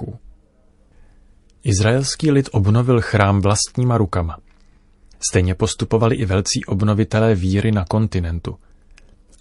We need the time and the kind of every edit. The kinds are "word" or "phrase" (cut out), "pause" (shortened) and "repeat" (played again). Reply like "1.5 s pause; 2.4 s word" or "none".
none